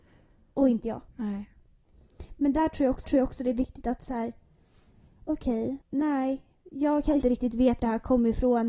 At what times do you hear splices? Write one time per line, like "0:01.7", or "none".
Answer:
0:01.1
0:03.0
0:05.8
0:07.2
0:07.8